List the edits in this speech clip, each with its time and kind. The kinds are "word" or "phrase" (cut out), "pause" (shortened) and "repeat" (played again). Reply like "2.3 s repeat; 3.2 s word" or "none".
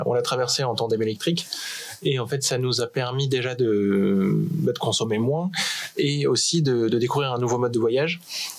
none